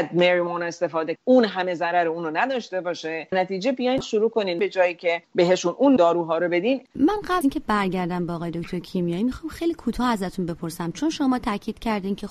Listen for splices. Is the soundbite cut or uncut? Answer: cut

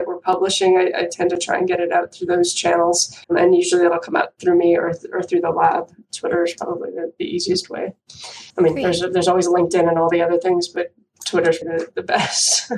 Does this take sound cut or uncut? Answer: cut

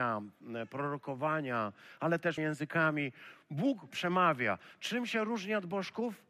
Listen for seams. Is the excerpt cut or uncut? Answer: cut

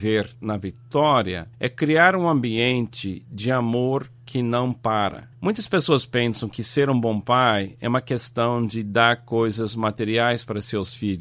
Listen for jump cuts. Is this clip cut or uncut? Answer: cut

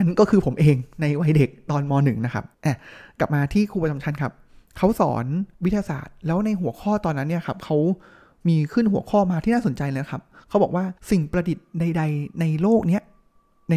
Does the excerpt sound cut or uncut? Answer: cut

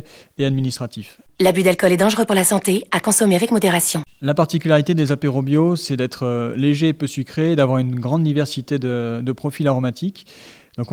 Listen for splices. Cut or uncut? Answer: uncut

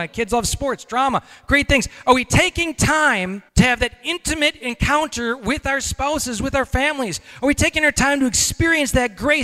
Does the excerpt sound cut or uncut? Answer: cut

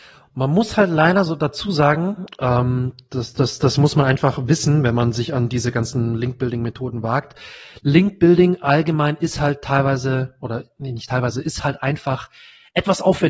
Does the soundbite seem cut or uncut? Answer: uncut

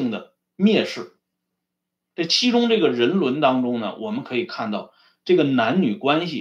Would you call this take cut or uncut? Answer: uncut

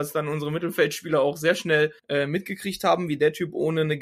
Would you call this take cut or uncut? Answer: cut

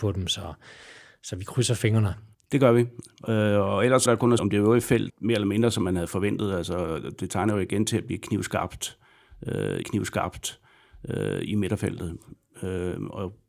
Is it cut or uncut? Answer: cut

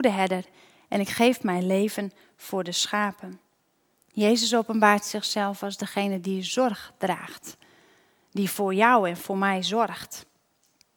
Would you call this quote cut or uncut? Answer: uncut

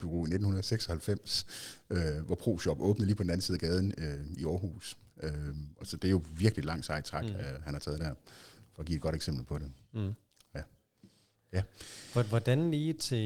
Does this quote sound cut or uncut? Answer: uncut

